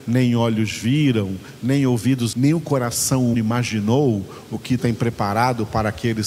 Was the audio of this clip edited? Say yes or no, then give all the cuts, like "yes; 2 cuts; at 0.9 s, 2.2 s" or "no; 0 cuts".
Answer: yes; 3 cuts; at 2.3 s, 3.3 s, 4.8 s